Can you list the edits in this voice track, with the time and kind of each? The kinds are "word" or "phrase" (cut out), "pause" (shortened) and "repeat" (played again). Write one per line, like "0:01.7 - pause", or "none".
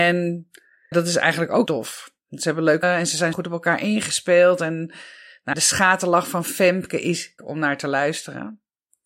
0:00.9 - word
0:01.7 - word
0:02.8 - word
0:03.3 - word
0:05.5 - word
0:07.4 - word